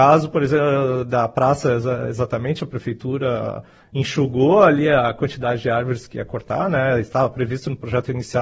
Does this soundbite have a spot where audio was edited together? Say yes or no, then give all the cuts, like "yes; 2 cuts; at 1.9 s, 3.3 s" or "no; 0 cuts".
no; 0 cuts